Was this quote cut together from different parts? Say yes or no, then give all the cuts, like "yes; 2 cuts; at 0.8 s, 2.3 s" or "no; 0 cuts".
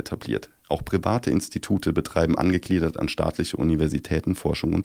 no; 0 cuts